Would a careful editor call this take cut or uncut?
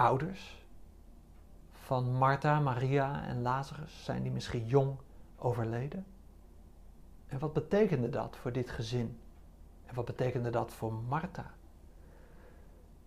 uncut